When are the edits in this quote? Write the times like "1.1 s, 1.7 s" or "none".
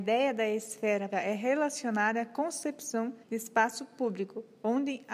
1.1 s, 3.2 s

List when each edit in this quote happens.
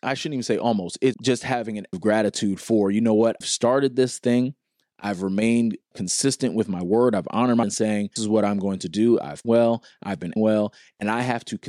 1.1 s, 1.9 s, 3.4 s, 5.9 s, 7.6 s, 8.2 s, 9.4 s, 10.4 s

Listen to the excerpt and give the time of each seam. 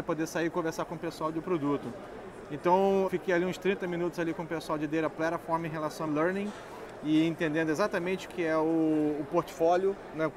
3.1 s, 6.1 s, 8.3 s

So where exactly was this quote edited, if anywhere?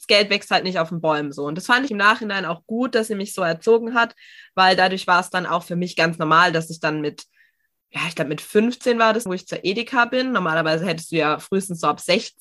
1.9 s, 9.3 s

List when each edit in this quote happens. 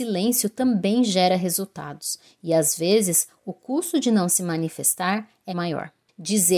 5.5 s

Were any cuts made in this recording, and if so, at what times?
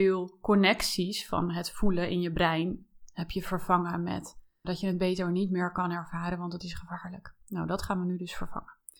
4.6 s

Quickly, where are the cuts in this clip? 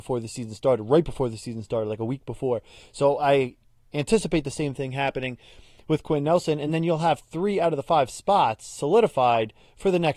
none

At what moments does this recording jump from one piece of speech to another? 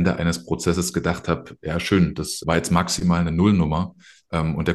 2.4 s

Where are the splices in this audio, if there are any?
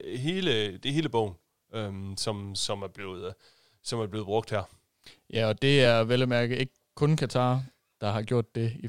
none

